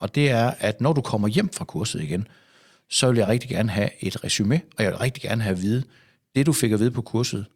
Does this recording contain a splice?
no; 0 cuts

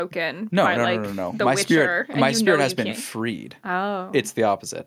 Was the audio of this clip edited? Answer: no; 0 cuts

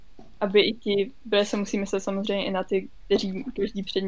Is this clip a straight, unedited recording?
yes; 0 cuts

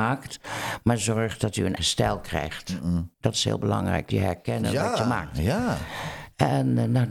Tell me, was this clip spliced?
yes; 3 cuts; at 1.8 s, 3.1 s, 4.1 s

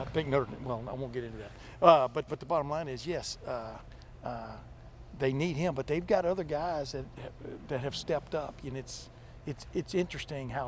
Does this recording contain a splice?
yes; 2 cuts; at 2.3 s, 8.7 s

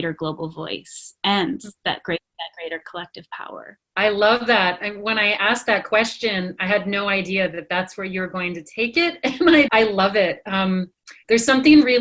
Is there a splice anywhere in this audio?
yes; 1 cut; at 9.7 s

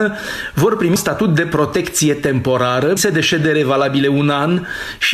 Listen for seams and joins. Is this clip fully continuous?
no; 2 cuts; at 1.0 s, 3.0 s

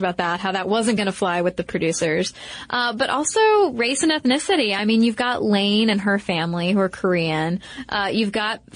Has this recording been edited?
no; 0 cuts

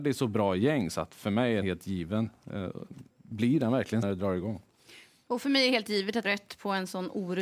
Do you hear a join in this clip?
yes; 4 cuts; at 1.6 s, 3.1 s, 4.0 s, 6.2 s

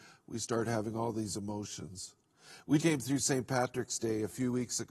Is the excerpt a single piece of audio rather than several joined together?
no; 1 cut; at 2.8 s

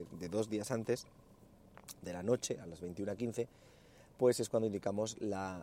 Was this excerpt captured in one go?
yes; 0 cuts

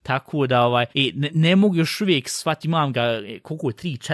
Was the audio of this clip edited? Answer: yes; 3 cuts; at 0.9 s, 1.3 s, 2.6 s

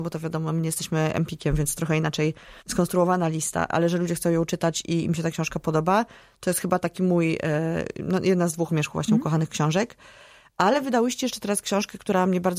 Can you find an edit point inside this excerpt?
yes; 4 cuts; at 1.7 s, 2.6 s, 3.7 s, 8.7 s

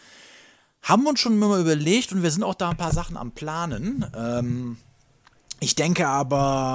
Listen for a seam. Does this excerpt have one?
no; 0 cuts

